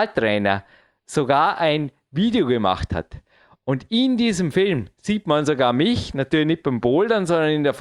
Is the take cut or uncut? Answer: uncut